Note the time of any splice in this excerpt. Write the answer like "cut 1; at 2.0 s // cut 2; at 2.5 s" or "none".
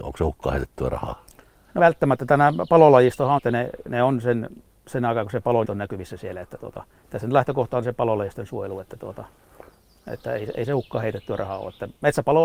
cut 1; at 1.8 s // cut 2; at 3.4 s // cut 3; at 5.6 s